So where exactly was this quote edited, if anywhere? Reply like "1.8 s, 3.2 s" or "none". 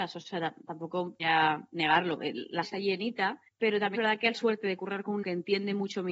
1.2 s, 2.6 s, 3.5 s, 3.9 s, 4.3 s, 5.2 s